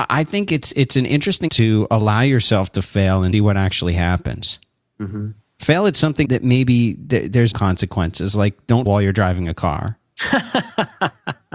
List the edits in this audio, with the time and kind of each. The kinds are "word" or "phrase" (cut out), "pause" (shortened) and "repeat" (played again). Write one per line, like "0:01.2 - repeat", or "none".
0:01.5 - word
0:03.3 - word
0:06.2 - word
0:07.5 - word
0:08.9 - word